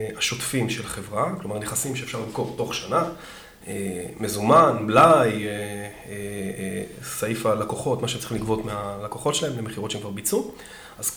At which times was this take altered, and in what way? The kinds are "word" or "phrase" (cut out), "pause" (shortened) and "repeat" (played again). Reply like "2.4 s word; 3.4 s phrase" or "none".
none